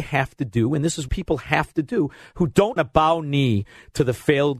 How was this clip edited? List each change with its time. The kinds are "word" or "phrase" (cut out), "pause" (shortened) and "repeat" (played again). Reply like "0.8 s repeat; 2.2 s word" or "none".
1.1 s word; 2.8 s word